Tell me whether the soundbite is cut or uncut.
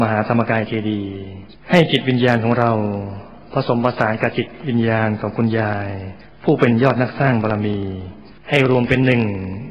cut